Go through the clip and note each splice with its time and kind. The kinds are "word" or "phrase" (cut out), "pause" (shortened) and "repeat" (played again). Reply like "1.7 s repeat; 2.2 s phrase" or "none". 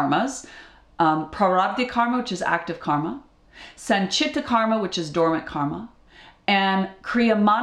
none